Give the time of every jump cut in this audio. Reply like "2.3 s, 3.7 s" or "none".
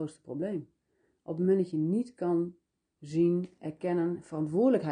none